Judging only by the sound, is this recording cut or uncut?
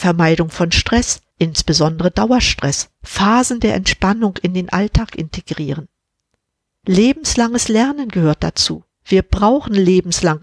cut